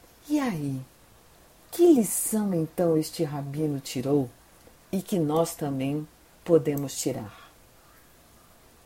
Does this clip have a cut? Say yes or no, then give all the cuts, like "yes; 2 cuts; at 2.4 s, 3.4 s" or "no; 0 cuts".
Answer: no; 0 cuts